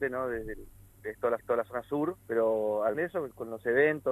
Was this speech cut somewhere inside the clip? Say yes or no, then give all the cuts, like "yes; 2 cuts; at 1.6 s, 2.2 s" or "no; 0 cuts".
yes; 4 cuts; at 1.0 s, 1.4 s, 2.2 s, 2.9 s